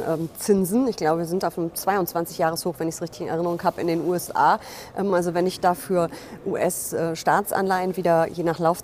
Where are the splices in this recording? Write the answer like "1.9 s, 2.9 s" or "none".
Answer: none